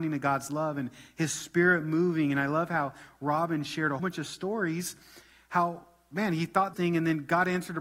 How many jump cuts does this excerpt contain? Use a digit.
2